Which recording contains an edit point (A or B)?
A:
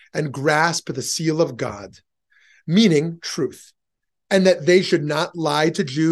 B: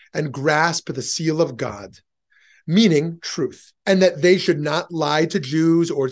B